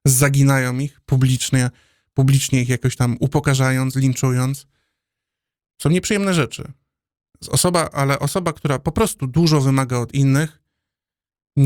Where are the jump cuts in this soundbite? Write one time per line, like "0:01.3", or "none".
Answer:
none

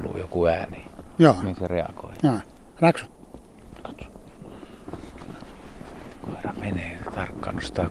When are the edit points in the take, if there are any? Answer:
none

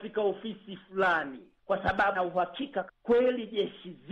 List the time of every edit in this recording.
0:01.6
0:02.1
0:02.9

